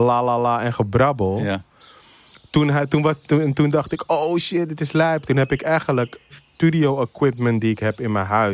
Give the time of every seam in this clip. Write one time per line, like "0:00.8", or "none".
0:06.3